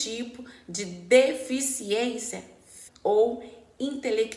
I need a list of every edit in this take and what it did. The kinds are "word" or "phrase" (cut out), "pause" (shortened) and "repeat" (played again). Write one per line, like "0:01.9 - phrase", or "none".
0:02.9 - word